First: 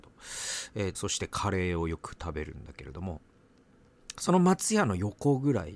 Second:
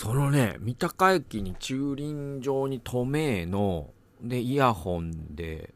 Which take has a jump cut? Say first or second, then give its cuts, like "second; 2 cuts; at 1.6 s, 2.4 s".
first; 1 cut; at 0.9 s